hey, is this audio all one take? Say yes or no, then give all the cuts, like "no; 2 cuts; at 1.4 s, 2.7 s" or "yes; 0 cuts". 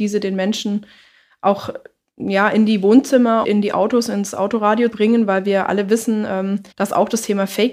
no; 3 cuts; at 3.4 s, 4.9 s, 6.7 s